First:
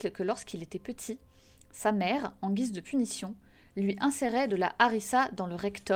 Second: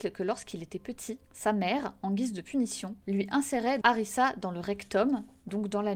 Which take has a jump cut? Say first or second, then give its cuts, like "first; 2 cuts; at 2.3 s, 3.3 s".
second; 3 cuts; at 1.2 s, 3.0 s, 3.8 s